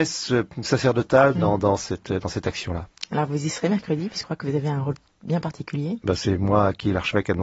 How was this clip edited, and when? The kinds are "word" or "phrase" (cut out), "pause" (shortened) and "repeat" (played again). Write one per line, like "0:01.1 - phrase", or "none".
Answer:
0:04.2 - word